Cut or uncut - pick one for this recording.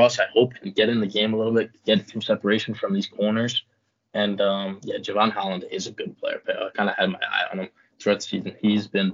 uncut